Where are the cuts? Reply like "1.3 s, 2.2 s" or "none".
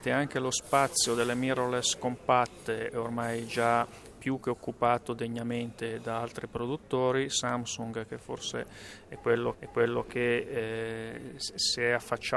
9.5 s